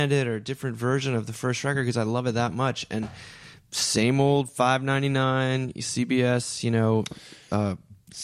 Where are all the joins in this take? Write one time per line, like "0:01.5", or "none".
none